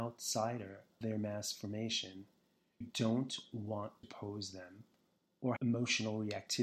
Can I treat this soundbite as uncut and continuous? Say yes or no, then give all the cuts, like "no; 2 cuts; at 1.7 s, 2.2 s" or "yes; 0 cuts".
no; 4 cuts; at 1.0 s, 2.8 s, 4.0 s, 5.6 s